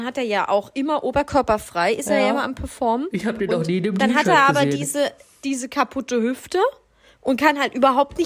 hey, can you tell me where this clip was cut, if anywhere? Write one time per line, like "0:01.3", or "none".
none